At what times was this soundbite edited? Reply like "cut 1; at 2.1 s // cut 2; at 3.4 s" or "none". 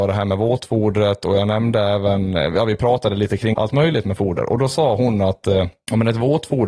cut 1; at 3.5 s